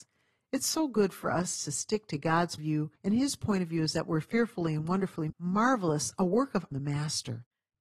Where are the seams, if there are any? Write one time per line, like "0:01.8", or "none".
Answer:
0:02.6
0:03.0
0:05.3
0:06.7

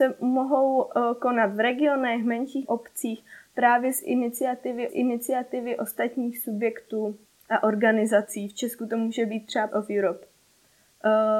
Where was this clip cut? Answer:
0:02.6
0:04.9
0:07.2
0:09.7

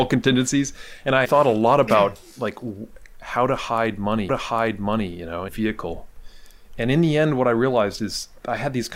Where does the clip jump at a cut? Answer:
0:01.2
0:04.3
0:05.5

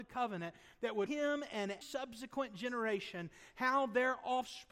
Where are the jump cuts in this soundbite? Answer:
0:01.1
0:01.8

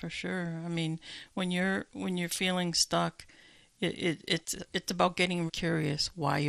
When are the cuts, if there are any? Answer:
0:05.5

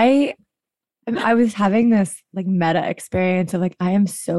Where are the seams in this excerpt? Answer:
none

